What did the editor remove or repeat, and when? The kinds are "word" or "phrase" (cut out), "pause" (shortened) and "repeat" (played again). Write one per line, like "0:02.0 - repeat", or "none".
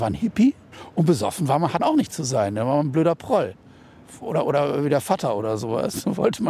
0:01.8 - word